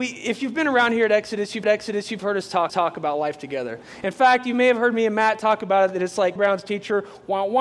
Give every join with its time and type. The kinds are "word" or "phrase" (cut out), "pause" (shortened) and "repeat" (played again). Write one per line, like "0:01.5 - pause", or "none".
0:01.6 - repeat
0:02.7 - repeat
0:06.4 - word